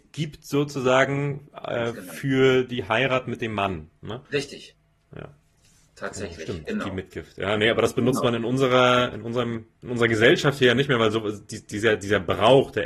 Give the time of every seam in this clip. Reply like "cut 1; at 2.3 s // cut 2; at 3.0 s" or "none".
cut 1; at 4.2 s // cut 2; at 9.7 s

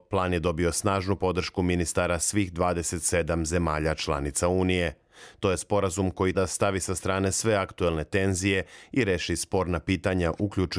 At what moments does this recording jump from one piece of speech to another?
cut 1; at 6.3 s

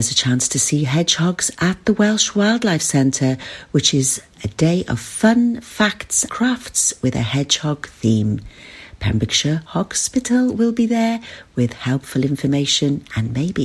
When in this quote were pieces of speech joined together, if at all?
cut 1; at 4.4 s // cut 2; at 6.3 s // cut 3; at 9.7 s

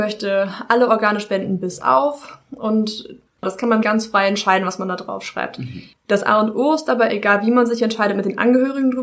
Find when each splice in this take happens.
cut 1; at 3.8 s // cut 2; at 7.1 s

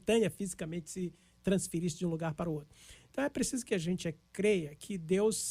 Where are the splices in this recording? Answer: none

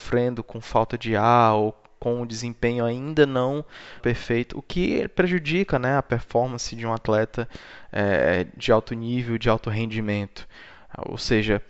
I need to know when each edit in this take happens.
cut 1; at 4.0 s

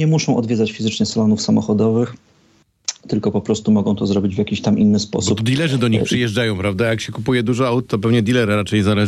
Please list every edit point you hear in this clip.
none

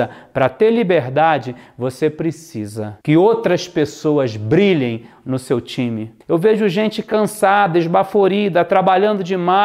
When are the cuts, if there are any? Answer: cut 1; at 3.0 s // cut 2; at 6.2 s

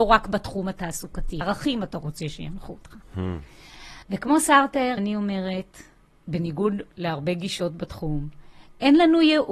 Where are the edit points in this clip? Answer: cut 1; at 1.4 s // cut 2; at 4.0 s // cut 3; at 5.0 s // cut 4; at 6.9 s

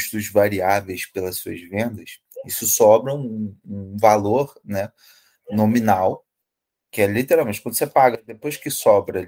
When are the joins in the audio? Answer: none

